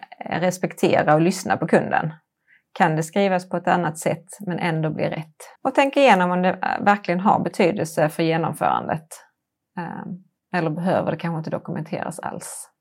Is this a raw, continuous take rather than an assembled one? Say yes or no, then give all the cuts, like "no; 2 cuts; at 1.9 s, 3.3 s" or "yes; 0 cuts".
no; 1 cut; at 5.6 s